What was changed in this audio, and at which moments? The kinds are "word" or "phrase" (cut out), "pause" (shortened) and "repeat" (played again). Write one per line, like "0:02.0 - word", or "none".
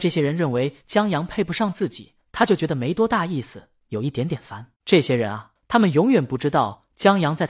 0:02.2 - pause
0:04.8 - pause
0:05.6 - pause